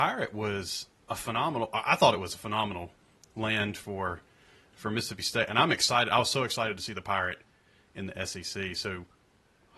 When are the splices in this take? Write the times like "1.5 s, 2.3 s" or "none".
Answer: none